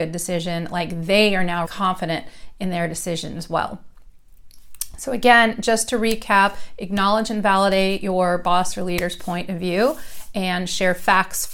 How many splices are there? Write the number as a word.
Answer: one